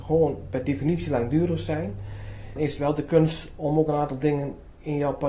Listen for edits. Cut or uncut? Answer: cut